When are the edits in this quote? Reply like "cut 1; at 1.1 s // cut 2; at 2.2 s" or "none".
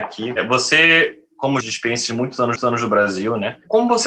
cut 1; at 1.6 s // cut 2; at 2.6 s